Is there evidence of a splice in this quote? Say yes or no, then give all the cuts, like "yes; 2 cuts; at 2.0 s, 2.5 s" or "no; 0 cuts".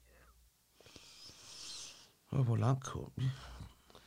no; 0 cuts